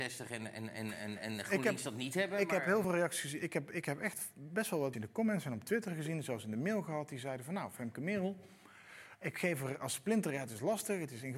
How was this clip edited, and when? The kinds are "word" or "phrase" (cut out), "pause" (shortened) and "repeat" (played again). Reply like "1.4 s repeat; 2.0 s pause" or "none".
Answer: 2.8 s phrase; 4.9 s word